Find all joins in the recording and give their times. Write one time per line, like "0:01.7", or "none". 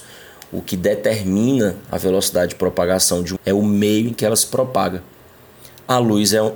0:03.4